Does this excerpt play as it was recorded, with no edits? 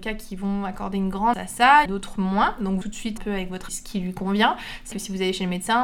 no; 6 cuts; at 1.3 s, 1.9 s, 2.8 s, 3.2 s, 3.7 s, 4.9 s

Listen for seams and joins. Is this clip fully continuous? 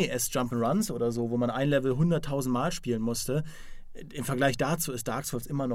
yes; 0 cuts

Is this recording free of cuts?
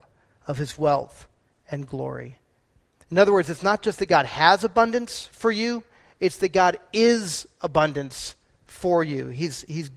yes; 0 cuts

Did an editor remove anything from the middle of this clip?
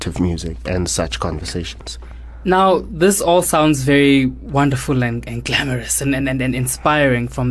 no; 0 cuts

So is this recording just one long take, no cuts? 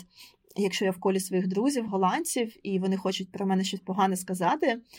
yes; 0 cuts

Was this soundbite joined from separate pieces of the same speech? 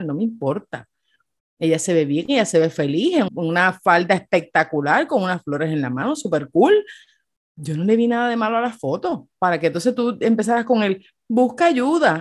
yes; 1 cut; at 3.3 s

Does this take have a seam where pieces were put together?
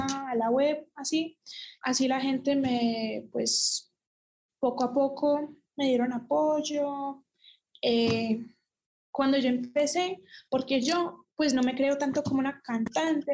no; 0 cuts

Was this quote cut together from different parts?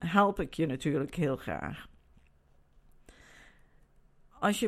no; 0 cuts

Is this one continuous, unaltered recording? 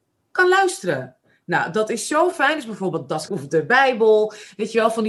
no; 1 cut; at 3.3 s

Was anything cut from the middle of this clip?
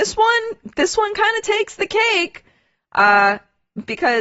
no; 0 cuts

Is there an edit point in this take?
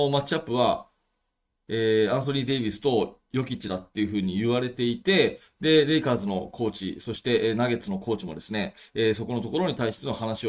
no; 0 cuts

